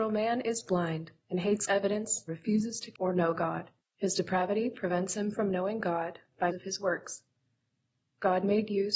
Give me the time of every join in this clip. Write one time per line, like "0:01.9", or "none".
0:01.2
0:01.7
0:02.3
0:02.9
0:03.8
0:06.5